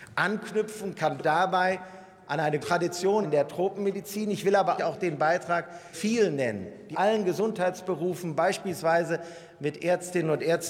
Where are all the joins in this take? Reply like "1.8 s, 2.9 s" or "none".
1.2 s, 2.6 s, 3.2 s, 4.8 s, 5.9 s, 6.9 s